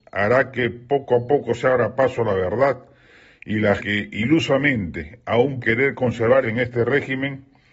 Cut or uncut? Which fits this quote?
cut